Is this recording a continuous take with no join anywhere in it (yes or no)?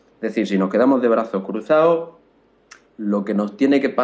yes